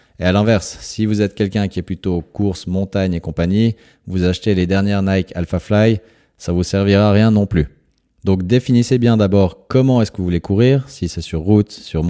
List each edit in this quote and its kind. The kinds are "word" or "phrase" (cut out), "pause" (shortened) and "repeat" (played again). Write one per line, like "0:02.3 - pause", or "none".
none